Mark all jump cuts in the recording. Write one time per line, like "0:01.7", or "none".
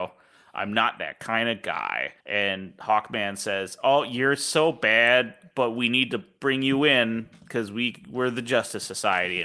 0:02.2